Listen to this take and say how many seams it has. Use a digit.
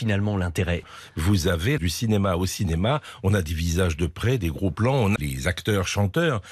2